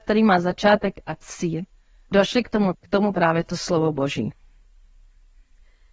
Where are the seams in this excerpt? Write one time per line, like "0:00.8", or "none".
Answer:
0:02.1
0:02.7
0:03.1